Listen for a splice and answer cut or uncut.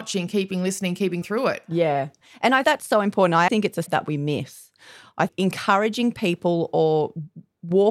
cut